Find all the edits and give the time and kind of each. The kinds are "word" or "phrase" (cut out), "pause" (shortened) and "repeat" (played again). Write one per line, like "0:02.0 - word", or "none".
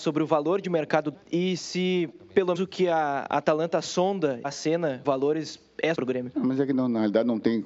0:01.1 - word
0:02.5 - word
0:04.4 - word
0:05.0 - word
0:05.9 - word

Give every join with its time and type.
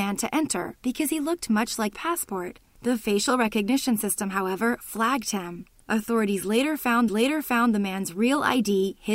0:01.9 - phrase
0:07.1 - repeat

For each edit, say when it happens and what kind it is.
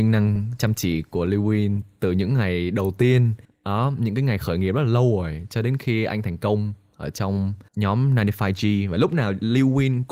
0:03.4 - pause
0:07.7 - pause

